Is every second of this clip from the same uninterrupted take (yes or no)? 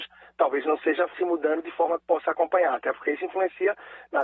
no